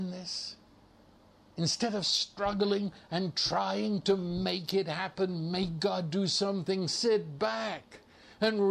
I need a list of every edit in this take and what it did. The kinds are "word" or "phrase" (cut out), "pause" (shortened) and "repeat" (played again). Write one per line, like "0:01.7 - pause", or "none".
none